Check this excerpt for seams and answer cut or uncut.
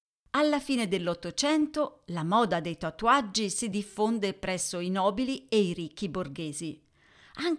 uncut